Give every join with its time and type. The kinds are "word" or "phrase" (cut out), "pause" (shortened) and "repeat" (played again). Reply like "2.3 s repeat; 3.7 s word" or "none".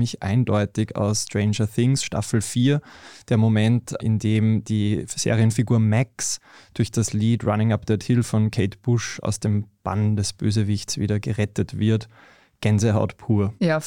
none